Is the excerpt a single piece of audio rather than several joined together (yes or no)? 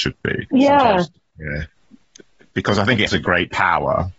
no